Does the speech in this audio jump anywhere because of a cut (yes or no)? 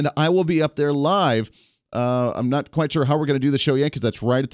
no